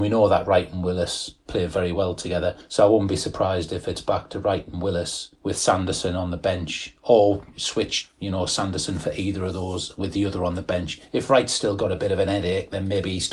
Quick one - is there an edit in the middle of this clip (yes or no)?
no